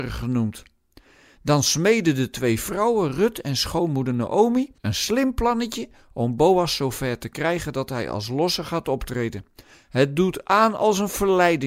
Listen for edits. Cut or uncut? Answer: cut